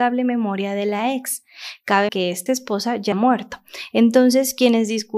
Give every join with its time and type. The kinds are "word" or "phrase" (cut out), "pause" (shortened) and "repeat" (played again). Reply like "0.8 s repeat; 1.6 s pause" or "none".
2.1 s word; 2.5 s word; 3.1 s word